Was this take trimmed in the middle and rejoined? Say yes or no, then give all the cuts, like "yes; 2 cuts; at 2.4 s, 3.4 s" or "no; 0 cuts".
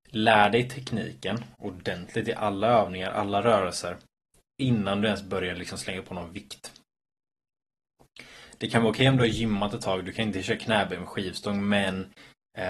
no; 0 cuts